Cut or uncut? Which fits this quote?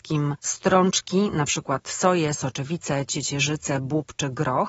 uncut